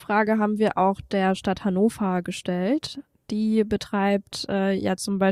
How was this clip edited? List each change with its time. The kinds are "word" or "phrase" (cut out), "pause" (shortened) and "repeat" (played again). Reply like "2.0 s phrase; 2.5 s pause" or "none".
none